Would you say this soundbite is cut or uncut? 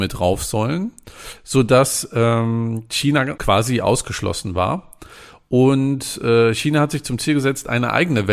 uncut